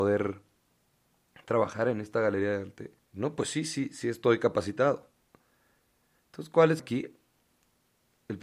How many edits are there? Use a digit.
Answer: 2